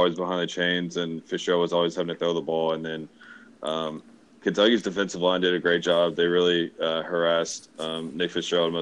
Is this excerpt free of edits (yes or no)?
yes